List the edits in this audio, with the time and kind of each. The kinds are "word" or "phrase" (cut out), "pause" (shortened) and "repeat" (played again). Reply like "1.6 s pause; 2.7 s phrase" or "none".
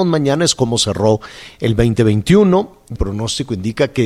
3.0 s word